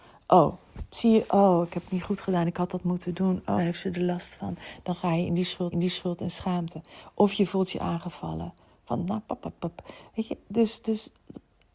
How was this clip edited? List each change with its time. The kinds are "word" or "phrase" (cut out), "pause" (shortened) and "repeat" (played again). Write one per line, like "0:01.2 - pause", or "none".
0:03.6 - word
0:05.7 - repeat